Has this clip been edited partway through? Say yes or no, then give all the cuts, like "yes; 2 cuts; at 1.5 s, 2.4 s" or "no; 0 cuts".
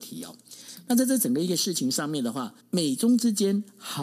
yes; 1 cut; at 2.6 s